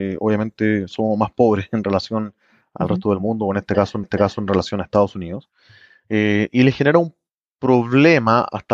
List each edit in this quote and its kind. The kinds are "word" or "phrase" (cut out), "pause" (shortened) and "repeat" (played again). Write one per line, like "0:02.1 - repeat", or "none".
0:04.0 - repeat